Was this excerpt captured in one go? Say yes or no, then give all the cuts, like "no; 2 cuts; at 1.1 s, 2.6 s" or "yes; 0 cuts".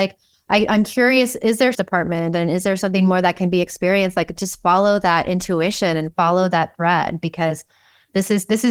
no; 1 cut; at 1.7 s